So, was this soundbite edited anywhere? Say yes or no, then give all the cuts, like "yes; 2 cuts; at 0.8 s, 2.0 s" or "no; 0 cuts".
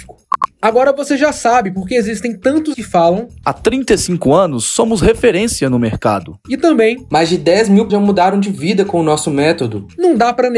yes; 2 cuts; at 2.7 s, 7.9 s